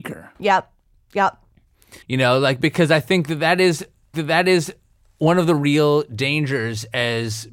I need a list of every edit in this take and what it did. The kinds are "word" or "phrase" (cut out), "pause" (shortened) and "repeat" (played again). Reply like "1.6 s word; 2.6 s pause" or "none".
2.0 s pause; 4.1 s repeat